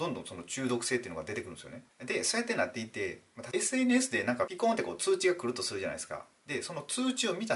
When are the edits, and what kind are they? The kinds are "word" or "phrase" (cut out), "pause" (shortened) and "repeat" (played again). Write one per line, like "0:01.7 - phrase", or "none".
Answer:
0:03.5 - phrase